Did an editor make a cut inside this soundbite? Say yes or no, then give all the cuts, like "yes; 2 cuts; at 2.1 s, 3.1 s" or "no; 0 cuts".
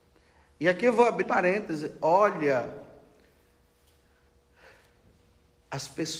yes; 1 cut; at 1.2 s